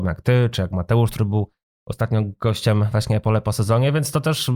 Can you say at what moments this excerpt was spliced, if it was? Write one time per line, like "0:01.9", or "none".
none